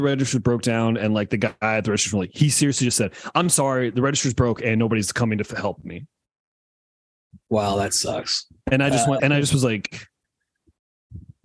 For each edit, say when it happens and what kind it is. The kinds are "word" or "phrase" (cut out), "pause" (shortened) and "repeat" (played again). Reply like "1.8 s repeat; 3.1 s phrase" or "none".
9.2 s word

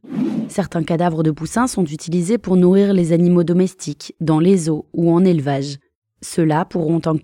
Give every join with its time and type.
none

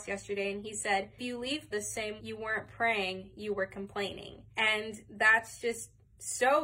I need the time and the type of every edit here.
1.2 s word; 1.7 s word; 2.2 s word; 4.5 s pause

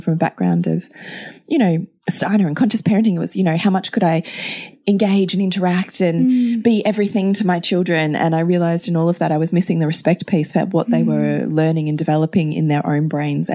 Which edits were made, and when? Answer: none

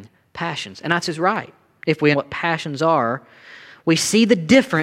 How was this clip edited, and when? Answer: 1.0 s phrase; 2.1 s word

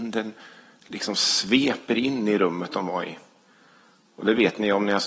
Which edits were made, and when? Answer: none

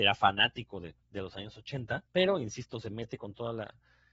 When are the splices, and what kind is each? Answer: 1.0 s pause; 2.1 s pause

